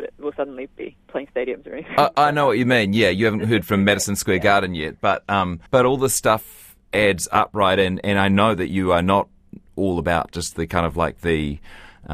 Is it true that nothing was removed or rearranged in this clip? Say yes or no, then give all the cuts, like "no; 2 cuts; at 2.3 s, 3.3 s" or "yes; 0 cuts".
no; 1 cut; at 5.7 s